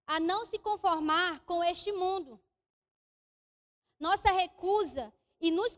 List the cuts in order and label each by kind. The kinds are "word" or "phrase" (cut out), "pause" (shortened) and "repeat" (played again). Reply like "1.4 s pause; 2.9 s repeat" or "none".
none